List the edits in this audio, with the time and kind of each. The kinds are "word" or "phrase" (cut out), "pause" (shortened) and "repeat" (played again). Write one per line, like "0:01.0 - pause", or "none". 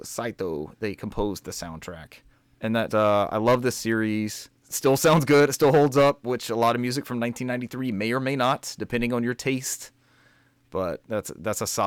0:02.3 - pause
0:02.9 - word